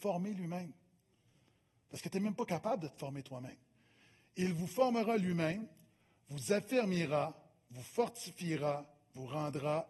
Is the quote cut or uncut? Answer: uncut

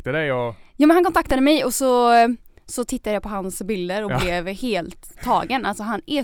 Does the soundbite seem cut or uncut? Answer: uncut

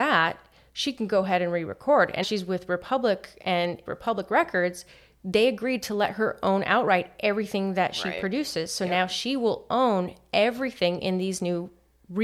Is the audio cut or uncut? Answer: cut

